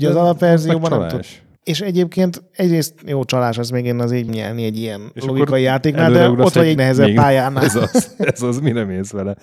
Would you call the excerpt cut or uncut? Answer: cut